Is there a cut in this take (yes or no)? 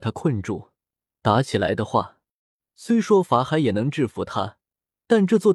no